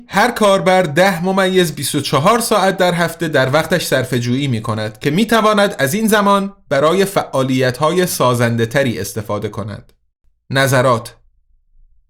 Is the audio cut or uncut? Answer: uncut